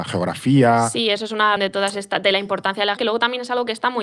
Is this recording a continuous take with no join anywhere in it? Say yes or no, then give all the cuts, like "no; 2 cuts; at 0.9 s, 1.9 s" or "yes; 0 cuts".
no; 2 cuts; at 1.6 s, 3.0 s